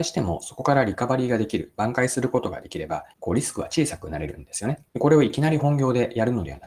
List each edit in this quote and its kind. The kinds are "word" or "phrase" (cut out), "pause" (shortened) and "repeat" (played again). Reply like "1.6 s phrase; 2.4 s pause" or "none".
3.1 s pause; 4.9 s pause